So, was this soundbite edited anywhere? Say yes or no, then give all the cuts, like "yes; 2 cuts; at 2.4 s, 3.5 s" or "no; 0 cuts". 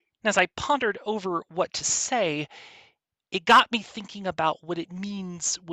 no; 0 cuts